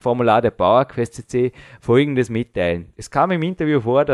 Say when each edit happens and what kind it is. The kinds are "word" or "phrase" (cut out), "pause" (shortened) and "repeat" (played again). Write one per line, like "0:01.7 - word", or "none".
none